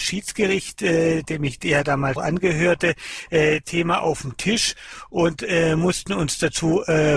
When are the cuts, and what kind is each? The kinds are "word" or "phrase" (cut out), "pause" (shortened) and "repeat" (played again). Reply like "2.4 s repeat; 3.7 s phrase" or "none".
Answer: 2.2 s word; 3.6 s word